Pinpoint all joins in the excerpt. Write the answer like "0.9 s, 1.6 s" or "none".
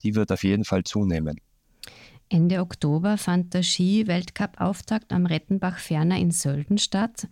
none